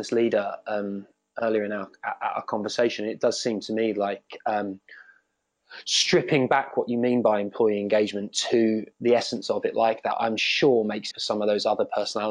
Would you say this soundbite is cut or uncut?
cut